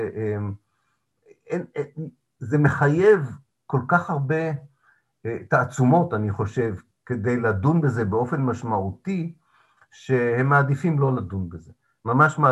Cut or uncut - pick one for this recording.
uncut